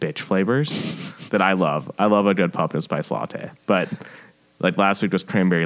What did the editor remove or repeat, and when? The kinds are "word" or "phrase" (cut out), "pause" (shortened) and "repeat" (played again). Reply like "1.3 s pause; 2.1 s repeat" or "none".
none